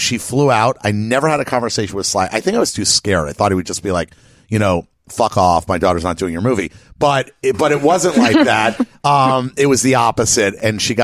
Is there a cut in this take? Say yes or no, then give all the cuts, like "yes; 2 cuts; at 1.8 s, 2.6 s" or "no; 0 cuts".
no; 0 cuts